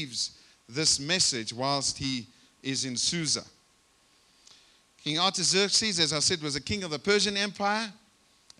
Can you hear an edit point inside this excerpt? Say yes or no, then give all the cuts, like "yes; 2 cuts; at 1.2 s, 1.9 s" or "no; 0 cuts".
no; 0 cuts